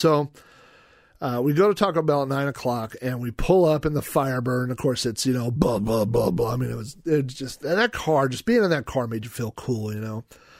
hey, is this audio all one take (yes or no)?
yes